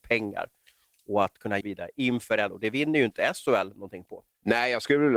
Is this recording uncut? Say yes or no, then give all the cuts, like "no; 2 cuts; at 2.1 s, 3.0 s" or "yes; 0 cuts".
no; 2 cuts; at 1.6 s, 2.5 s